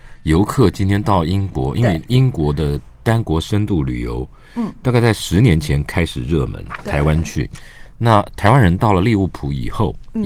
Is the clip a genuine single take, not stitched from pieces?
yes; 0 cuts

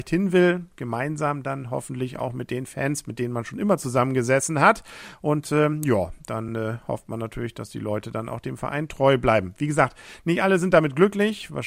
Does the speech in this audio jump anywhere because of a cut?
no; 0 cuts

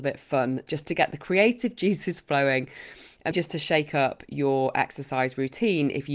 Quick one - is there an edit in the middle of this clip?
yes; 1 cut; at 3.3 s

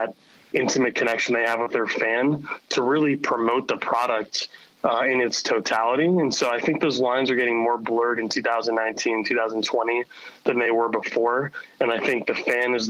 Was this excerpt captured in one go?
yes; 0 cuts

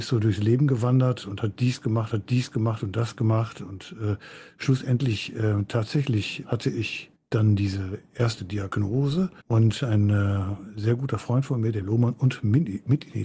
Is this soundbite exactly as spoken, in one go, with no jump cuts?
no; 5 cuts; at 2.1 s, 6.4 s, 7.1 s, 9.4 s, 11.8 s

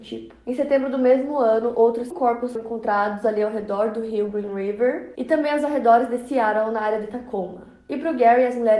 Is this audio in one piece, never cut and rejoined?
no; 2 cuts; at 2.1 s, 2.6 s

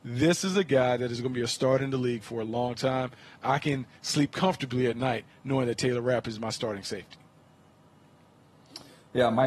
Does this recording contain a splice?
no; 0 cuts

